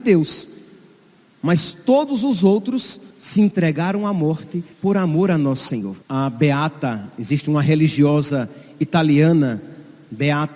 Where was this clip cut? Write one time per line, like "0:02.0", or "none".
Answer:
0:03.1
0:04.7
0:06.0